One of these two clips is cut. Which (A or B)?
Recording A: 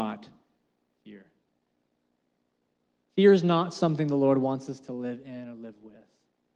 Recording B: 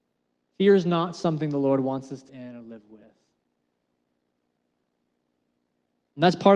B